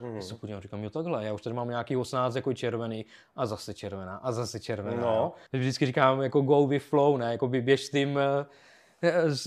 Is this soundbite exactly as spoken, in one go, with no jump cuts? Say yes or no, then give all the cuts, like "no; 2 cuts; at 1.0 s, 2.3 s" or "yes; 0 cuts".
no; 1 cut; at 5.5 s